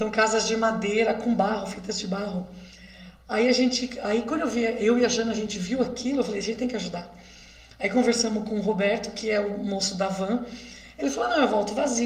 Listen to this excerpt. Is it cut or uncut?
uncut